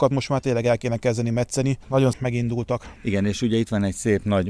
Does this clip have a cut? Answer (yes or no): yes